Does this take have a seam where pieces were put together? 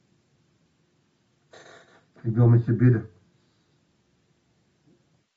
no; 0 cuts

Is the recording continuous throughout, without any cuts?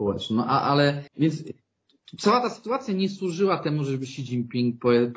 no; 1 cut; at 1.1 s

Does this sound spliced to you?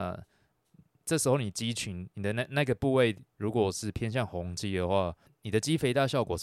yes; 1 cut; at 3.3 s

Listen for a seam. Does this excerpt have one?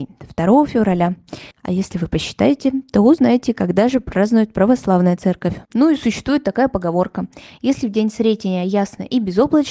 yes; 2 cuts; at 1.5 s, 5.6 s

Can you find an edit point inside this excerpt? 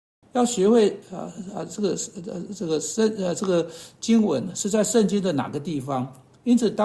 no; 0 cuts

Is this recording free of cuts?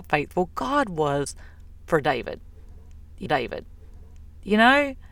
no; 1 cut; at 3.3 s

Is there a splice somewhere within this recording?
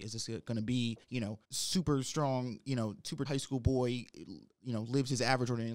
yes; 3 cuts; at 1.0 s, 1.4 s, 3.3 s

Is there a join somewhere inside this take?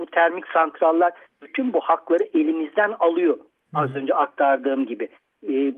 no; 0 cuts

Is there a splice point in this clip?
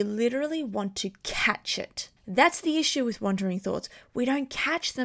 yes; 1 cut; at 2.2 s

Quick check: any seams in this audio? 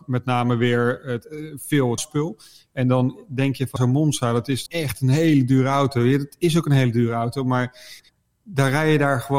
yes; 3 cuts; at 2.0 s, 3.8 s, 4.7 s

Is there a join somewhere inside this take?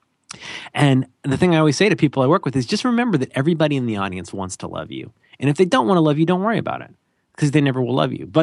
no; 0 cuts

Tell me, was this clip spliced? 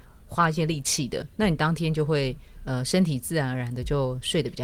no; 0 cuts

